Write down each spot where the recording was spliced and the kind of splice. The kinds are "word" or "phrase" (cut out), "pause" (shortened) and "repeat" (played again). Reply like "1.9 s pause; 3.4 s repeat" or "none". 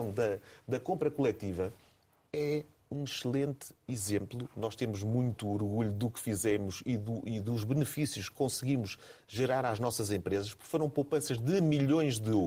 none